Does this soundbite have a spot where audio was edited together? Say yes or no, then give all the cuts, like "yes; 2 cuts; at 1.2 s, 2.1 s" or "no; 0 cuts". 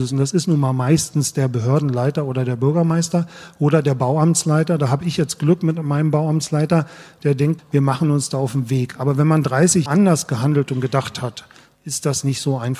yes; 2 cuts; at 7.6 s, 9.9 s